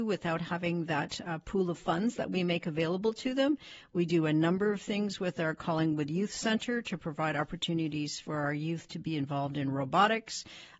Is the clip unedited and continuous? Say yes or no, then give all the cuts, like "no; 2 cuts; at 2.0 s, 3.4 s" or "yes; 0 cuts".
yes; 0 cuts